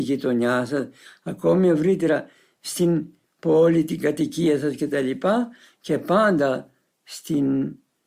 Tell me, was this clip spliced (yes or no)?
no